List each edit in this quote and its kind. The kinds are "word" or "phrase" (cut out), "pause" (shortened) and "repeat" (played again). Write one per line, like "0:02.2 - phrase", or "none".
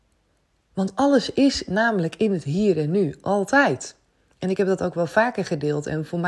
none